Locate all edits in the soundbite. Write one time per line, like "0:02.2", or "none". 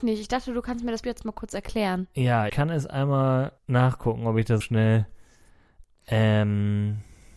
0:01.0
0:02.5
0:03.6
0:04.6